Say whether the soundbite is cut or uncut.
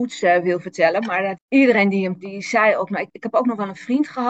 cut